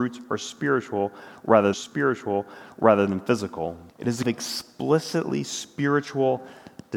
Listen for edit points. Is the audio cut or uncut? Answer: cut